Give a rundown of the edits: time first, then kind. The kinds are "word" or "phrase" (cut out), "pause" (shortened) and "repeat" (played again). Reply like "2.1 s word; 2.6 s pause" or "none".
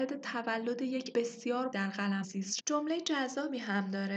1.1 s word; 1.7 s word; 2.2 s word; 2.6 s word